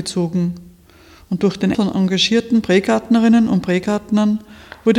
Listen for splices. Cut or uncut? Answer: cut